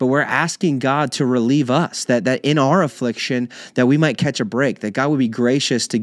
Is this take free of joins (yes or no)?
yes